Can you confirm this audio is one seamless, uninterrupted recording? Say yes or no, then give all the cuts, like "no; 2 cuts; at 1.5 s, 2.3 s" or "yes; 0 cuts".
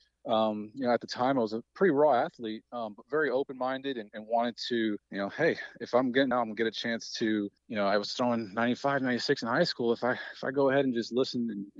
no; 3 cuts; at 5.0 s, 6.3 s, 7.6 s